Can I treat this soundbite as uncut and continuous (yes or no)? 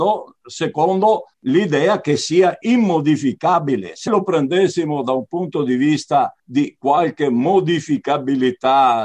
no